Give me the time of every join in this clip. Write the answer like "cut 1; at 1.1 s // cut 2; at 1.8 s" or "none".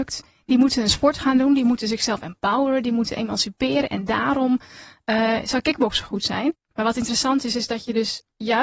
none